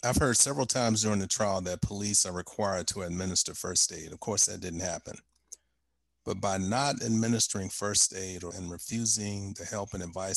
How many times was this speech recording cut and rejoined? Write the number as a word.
one